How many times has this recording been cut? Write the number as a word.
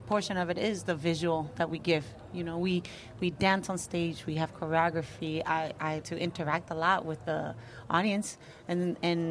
one